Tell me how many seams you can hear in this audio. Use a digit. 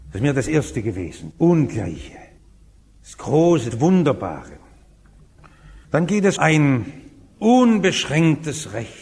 5